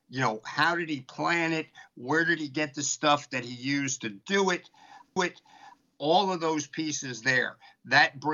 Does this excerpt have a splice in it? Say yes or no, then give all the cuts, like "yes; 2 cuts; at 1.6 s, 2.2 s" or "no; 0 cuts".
yes; 1 cut; at 5.2 s